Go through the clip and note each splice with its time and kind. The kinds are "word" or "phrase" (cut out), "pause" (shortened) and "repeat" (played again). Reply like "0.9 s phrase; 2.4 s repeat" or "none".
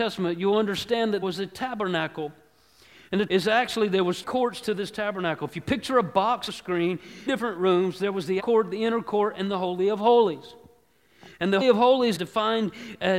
1.2 s word; 3.3 s word; 4.2 s word; 6.5 s word; 7.3 s word; 8.4 s word; 11.6 s word; 12.2 s word